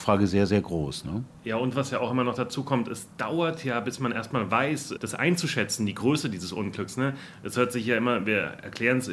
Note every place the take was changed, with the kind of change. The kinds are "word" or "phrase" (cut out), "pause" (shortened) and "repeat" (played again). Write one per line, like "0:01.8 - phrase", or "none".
0:05.0 - word